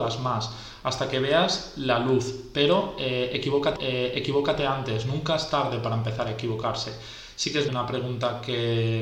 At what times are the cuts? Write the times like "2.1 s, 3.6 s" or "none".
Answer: 3.8 s, 7.7 s